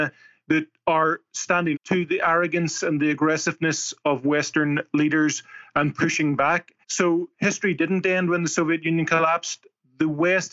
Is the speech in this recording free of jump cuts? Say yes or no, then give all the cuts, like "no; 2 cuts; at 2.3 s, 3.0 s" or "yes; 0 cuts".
no; 3 cuts; at 1.7 s, 4.0 s, 6.8 s